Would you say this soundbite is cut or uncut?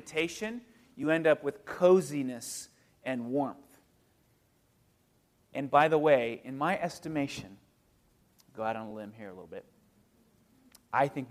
uncut